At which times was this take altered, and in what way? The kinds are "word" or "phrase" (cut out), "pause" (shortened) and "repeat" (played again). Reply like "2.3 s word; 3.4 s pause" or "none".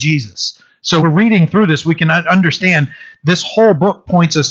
1.0 s word